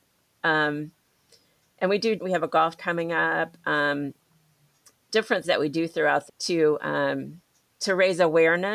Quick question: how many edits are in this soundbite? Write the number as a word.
four